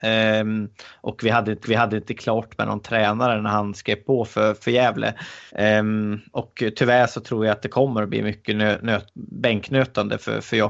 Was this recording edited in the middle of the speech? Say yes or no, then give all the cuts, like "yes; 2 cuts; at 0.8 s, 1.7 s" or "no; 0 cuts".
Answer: yes; 3 cuts; at 1.6 s, 5.5 s, 9.1 s